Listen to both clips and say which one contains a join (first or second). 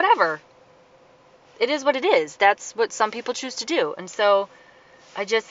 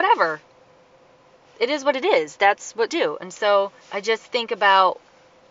second